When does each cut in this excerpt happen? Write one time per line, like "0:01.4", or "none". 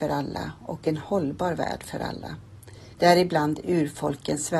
0:02.9